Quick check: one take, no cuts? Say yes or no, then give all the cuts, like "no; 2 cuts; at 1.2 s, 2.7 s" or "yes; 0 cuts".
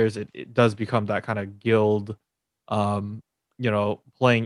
yes; 0 cuts